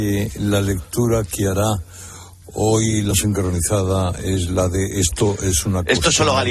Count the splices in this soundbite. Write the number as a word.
one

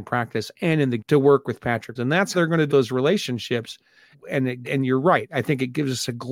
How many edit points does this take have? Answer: six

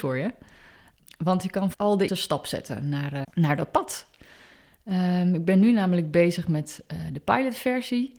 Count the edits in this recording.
three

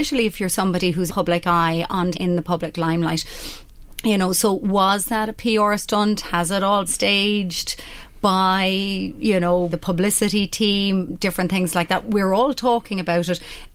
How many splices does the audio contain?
four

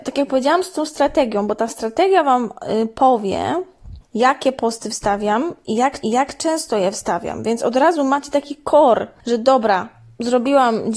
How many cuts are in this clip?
one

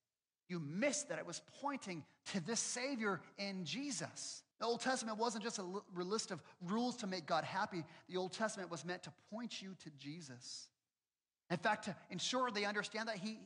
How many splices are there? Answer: one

